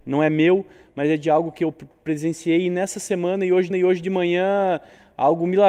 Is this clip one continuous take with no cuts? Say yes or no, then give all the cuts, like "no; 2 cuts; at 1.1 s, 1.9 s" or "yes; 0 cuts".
no; 1 cut; at 3.7 s